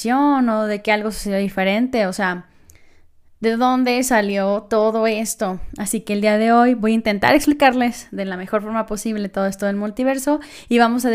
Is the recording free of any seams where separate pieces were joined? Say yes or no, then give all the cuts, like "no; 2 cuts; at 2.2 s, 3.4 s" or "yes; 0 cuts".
yes; 0 cuts